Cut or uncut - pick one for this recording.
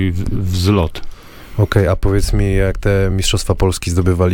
uncut